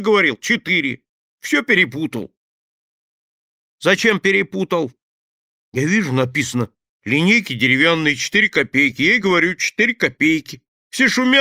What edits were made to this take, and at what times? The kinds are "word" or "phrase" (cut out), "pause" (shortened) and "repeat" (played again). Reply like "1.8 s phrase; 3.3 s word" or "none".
none